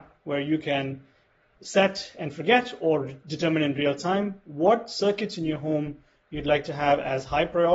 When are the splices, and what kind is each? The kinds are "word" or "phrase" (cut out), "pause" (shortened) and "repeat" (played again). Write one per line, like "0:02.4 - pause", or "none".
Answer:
none